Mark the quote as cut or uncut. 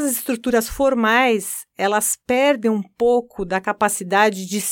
uncut